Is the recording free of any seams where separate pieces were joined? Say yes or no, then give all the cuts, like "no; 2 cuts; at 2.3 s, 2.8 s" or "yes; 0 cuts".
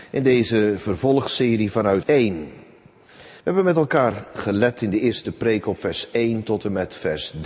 no; 2 cuts; at 2.0 s, 3.4 s